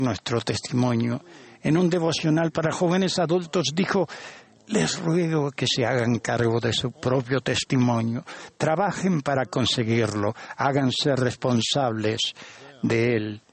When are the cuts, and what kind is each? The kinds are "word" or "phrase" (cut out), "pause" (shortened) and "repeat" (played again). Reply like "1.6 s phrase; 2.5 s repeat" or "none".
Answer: none